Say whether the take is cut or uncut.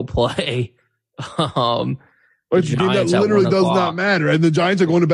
uncut